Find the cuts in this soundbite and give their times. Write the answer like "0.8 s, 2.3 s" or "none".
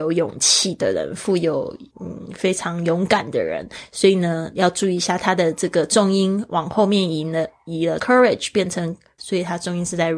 1.9 s, 8.0 s, 9.2 s